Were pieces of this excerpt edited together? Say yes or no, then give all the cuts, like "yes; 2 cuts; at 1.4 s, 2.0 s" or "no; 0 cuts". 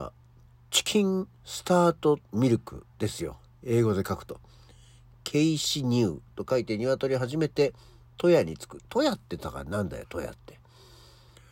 no; 0 cuts